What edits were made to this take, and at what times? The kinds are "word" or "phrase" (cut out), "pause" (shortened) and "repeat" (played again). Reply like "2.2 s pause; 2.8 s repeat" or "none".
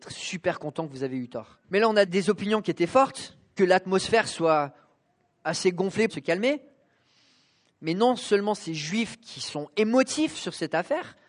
1.6 s pause; 2.1 s word; 3.6 s phrase; 6.1 s phrase